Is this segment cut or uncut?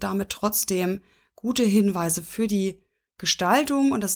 uncut